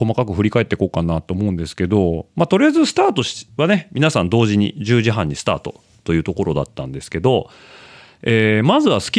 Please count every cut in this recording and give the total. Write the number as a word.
zero